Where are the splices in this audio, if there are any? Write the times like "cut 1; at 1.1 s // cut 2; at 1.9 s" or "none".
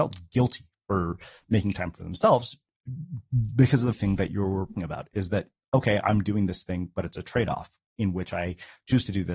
cut 1; at 3.9 s // cut 2; at 4.8 s